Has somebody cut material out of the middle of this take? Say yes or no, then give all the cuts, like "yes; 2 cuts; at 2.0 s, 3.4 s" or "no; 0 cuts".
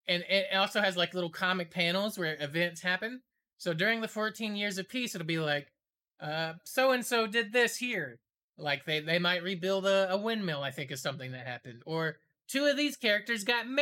no; 0 cuts